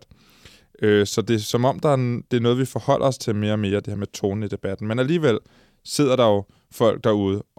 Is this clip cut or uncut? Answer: uncut